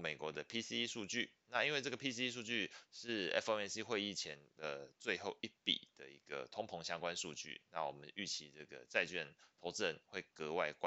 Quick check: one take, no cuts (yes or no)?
yes